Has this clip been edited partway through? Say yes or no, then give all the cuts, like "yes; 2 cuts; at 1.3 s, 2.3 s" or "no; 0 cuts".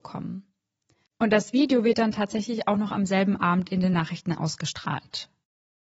no; 0 cuts